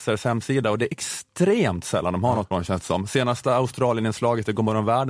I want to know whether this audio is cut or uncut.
cut